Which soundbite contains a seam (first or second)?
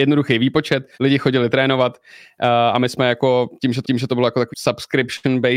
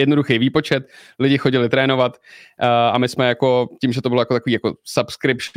first